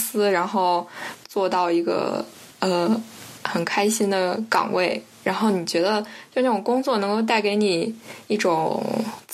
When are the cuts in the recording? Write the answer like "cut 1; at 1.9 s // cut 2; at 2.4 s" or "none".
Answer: none

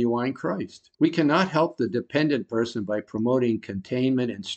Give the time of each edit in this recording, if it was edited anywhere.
cut 1; at 0.9 s

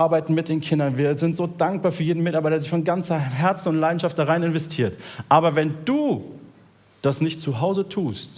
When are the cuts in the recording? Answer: none

